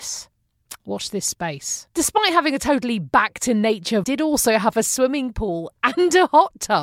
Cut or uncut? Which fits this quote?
cut